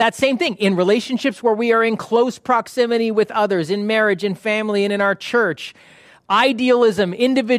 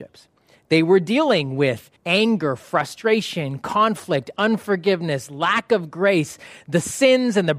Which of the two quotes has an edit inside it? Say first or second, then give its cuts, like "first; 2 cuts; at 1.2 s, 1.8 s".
second; 1 cut; at 2.0 s